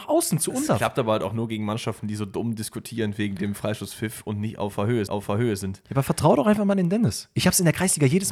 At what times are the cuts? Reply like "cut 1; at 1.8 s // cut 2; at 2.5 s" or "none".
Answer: cut 1; at 5.1 s